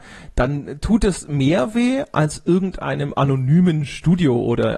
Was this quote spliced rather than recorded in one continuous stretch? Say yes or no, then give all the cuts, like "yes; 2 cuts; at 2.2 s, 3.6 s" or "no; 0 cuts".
no; 0 cuts